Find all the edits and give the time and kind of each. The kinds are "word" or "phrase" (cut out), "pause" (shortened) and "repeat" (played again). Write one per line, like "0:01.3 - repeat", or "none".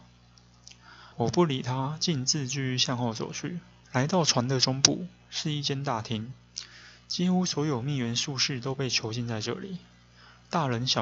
0:01.1 - pause
0:03.8 - pause